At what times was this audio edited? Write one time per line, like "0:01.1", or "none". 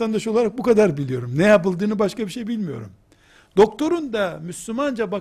none